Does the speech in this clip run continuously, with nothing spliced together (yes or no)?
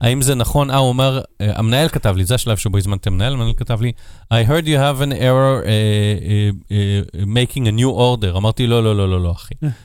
yes